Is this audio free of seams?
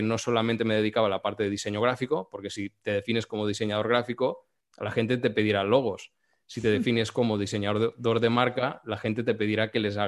yes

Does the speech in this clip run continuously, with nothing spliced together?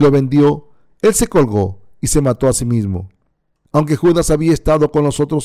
yes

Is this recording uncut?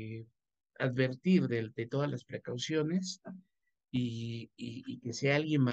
yes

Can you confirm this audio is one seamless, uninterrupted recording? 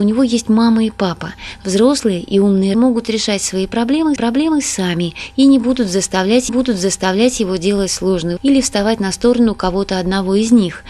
no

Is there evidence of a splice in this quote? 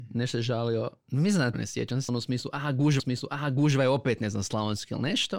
yes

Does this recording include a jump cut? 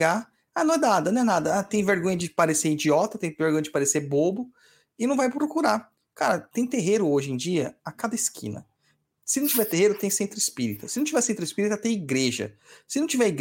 no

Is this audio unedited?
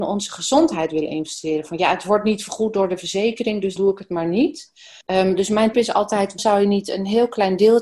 no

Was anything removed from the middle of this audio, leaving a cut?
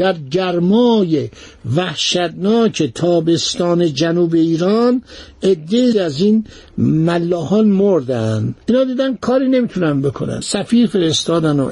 yes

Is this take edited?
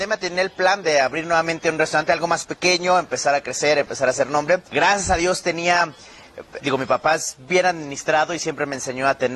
yes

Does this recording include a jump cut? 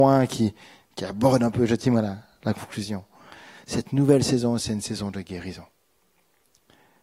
no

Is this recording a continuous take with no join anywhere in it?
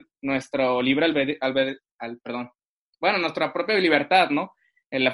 yes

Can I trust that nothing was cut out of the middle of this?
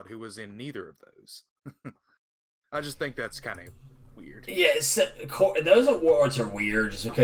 yes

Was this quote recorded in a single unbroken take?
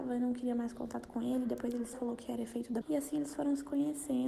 no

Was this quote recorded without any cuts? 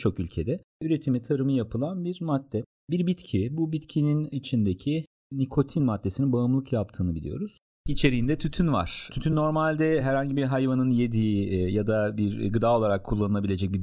yes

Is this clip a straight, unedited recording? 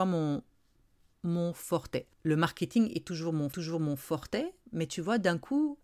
no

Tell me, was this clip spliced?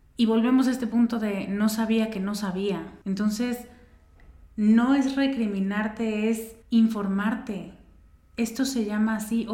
yes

